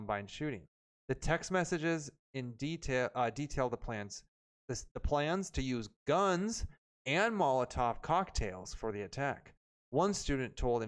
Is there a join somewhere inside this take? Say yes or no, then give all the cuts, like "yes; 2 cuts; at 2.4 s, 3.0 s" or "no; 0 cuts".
no; 0 cuts